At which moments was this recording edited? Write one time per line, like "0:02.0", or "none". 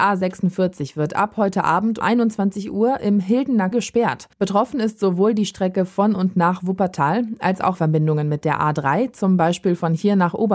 0:02.0
0:03.7
0:04.3
0:07.7